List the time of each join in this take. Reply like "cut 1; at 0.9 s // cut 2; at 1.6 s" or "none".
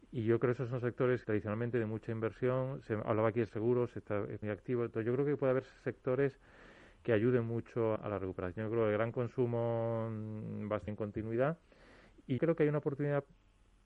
cut 1; at 1.2 s // cut 2; at 3.5 s // cut 3; at 4.4 s // cut 4; at 8.0 s // cut 5; at 10.9 s // cut 6; at 12.4 s